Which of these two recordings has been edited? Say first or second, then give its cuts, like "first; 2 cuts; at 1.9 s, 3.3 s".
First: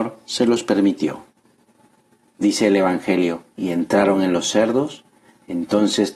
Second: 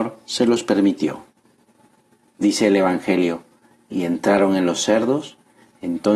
first; 1 cut; at 3.5 s